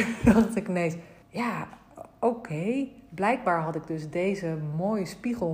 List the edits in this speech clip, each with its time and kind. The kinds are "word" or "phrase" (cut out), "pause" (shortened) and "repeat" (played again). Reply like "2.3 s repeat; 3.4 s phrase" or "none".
1.2 s pause